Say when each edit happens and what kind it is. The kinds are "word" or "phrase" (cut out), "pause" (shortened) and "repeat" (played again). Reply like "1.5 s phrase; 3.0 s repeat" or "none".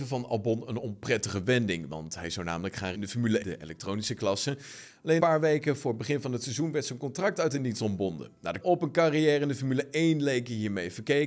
2.9 s word; 3.4 s word; 5.2 s word; 8.6 s word

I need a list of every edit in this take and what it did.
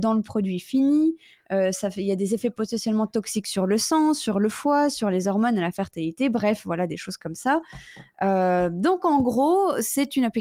none

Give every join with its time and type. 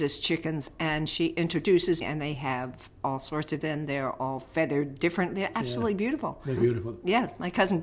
2.0 s word; 3.6 s word; 6.6 s word

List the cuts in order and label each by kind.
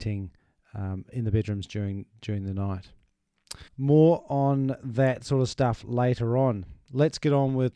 3.7 s pause

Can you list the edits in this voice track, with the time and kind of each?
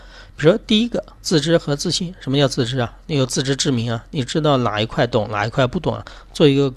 1.2 s pause

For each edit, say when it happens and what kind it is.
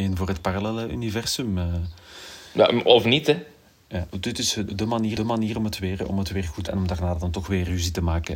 4.1 s pause; 4.7 s word; 5.2 s repeat; 6.7 s word

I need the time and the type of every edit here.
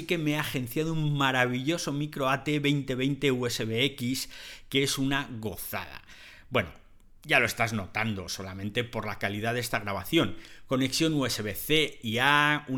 none

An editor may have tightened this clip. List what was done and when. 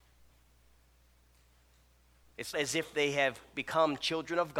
2.5 s word

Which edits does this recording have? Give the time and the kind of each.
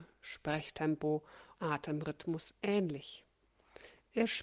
1.5 s word

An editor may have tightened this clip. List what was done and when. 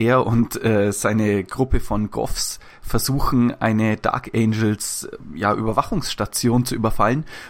none

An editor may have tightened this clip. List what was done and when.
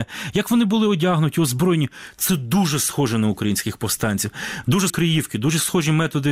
4.9 s word

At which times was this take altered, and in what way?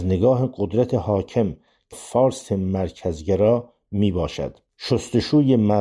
1.9 s word

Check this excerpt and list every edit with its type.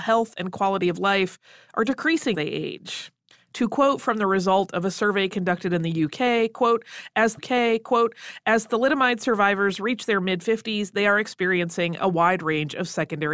2.3 s word; 7.4 s repeat

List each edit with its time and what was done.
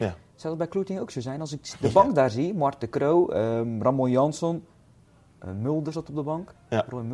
none

